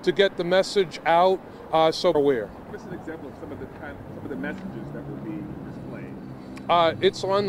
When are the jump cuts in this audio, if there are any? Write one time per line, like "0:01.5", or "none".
0:02.1
0:02.7